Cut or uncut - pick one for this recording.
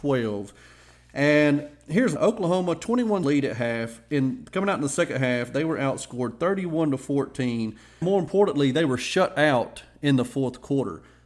cut